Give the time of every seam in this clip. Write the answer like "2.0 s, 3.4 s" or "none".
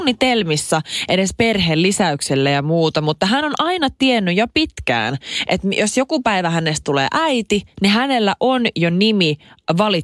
none